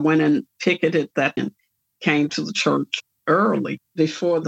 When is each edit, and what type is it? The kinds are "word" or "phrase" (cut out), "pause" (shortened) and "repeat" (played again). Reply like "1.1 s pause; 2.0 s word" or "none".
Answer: 1.4 s word; 2.3 s word